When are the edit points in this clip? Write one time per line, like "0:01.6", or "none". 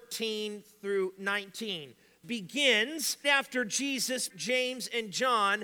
0:02.2
0:03.2
0:04.3